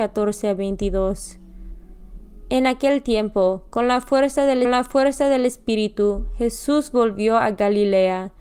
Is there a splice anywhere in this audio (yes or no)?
yes